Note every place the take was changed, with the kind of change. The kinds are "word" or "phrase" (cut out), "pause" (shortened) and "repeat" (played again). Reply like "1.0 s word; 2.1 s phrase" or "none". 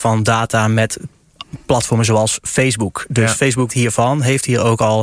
3.7 s word